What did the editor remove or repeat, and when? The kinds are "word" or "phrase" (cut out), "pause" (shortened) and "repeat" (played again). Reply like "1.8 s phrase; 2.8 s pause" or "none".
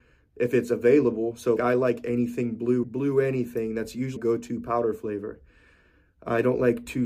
1.6 s word; 2.8 s word; 4.2 s word